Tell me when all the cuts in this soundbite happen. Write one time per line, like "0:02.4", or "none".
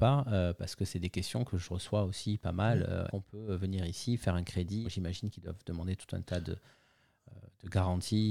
0:03.1
0:04.8